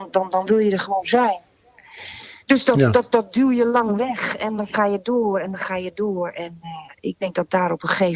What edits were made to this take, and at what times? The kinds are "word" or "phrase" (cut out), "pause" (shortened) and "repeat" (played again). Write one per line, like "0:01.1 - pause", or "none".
0:02.4 - pause